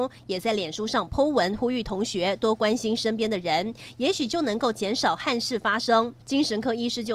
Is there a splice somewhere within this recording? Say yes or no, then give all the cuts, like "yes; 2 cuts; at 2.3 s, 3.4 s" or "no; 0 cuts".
yes; 1 cut; at 6.2 s